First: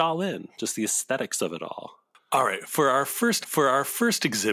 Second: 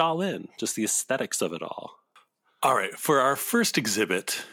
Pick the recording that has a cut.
first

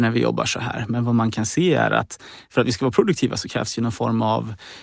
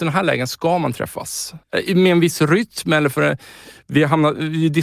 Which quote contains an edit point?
second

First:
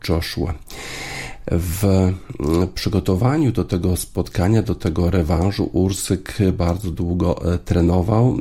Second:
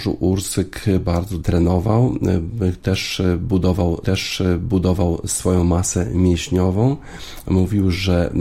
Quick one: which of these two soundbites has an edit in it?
second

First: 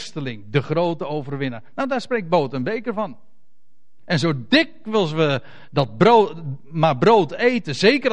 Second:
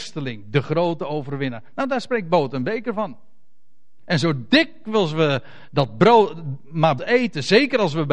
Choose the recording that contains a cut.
second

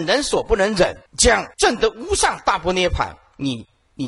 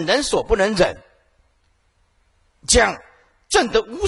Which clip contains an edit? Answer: first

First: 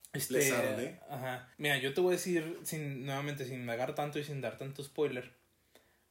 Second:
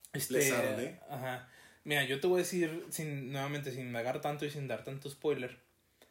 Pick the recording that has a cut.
first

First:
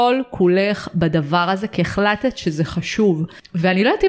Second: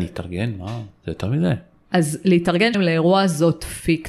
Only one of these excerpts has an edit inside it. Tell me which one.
second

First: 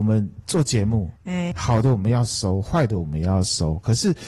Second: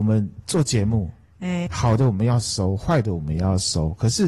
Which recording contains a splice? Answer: first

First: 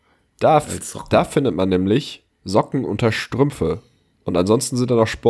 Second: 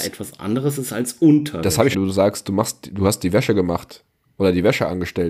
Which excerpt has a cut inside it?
second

